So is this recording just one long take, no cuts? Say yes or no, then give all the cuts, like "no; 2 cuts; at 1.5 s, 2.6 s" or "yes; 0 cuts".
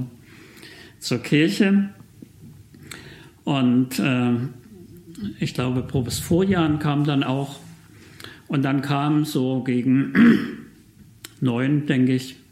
yes; 0 cuts